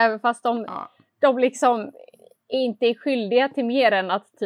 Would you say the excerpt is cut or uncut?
uncut